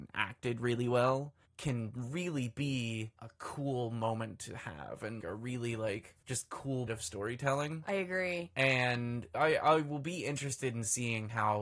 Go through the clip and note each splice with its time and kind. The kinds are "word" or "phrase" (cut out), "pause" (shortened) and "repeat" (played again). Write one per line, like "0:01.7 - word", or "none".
0:01.4 - pause
0:03.1 - pause
0:05.2 - word
0:06.2 - pause
0:06.9 - word
0:09.3 - word